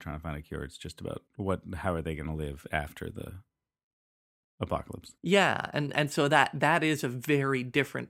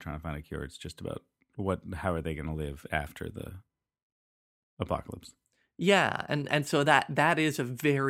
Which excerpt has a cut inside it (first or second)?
first